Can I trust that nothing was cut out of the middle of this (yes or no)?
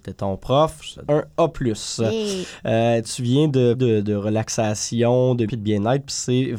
no